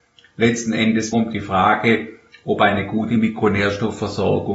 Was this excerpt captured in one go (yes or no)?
no